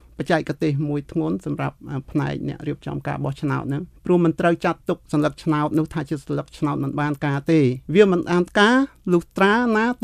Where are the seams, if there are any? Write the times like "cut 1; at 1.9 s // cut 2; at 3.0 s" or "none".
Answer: cut 1; at 4.0 s // cut 2; at 5.0 s // cut 3; at 7.9 s